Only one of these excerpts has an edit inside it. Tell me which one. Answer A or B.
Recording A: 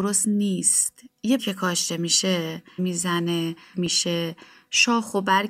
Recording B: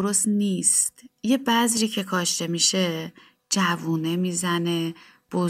A